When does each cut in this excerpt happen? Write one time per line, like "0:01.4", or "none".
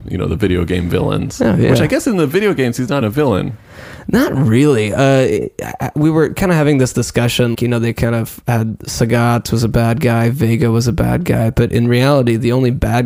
0:03.0
0:07.5